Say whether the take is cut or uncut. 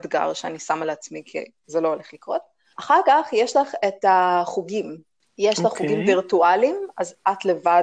uncut